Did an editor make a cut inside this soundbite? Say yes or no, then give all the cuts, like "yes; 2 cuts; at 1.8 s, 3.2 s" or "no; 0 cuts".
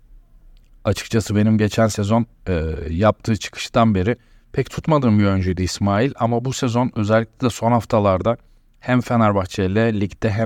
no; 0 cuts